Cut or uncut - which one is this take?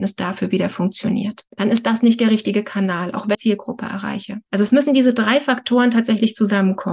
cut